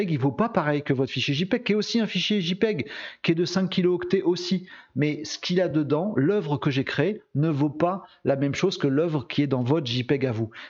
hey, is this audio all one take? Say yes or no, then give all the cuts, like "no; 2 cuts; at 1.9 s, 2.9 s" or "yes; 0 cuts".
yes; 0 cuts